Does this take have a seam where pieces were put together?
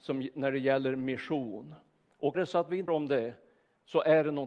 yes; 2 cuts; at 2.3 s, 2.9 s

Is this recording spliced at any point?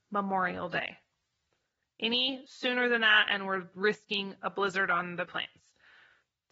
yes; 1 cut; at 5.2 s

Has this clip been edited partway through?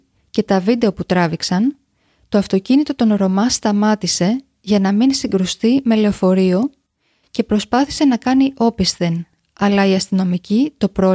no; 0 cuts

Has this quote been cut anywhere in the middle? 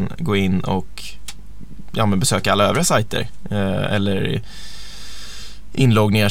no; 0 cuts

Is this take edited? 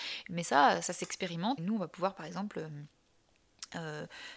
yes; 1 cut; at 1.6 s

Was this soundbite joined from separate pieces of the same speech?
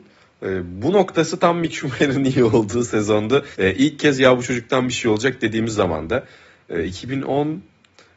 yes; 1 cut; at 3.5 s

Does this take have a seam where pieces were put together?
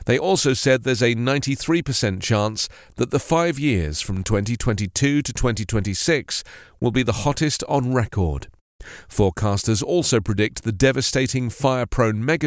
no; 0 cuts

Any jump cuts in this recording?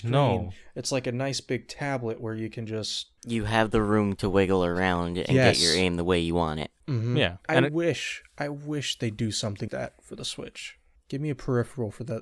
yes; 5 cuts; at 3.2 s, 6.8 s, 7.4 s, 9.7 s, 11.0 s

